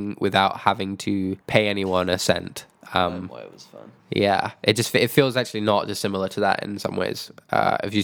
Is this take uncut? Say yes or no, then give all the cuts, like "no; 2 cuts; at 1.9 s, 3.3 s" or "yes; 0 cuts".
no; 2 cuts; at 1.4 s, 4.0 s